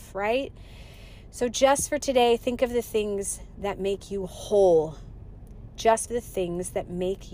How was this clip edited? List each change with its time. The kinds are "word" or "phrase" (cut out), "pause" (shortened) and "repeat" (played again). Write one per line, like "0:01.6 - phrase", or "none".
0:06.1 - phrase